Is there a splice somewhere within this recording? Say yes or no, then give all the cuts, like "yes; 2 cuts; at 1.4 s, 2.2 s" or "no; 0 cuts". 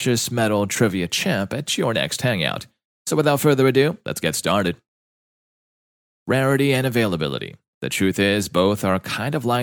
no; 0 cuts